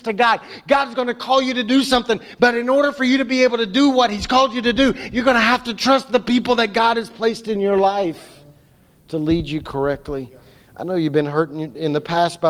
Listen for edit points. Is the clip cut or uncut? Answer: uncut